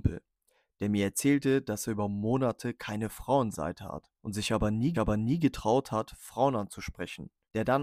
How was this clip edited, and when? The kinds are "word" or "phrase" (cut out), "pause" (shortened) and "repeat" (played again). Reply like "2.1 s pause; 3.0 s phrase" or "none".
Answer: 3.5 s word; 4.1 s pause; 4.9 s repeat